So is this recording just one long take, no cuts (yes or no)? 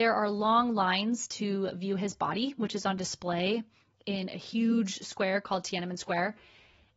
yes